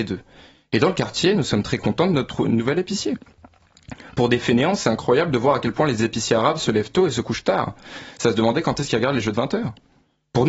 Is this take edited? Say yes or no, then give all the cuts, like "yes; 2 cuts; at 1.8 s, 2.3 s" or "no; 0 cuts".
no; 0 cuts